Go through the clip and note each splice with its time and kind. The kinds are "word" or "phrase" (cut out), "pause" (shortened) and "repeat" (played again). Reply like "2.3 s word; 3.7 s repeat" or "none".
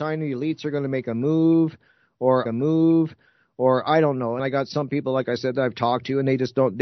2.5 s repeat; 4.4 s word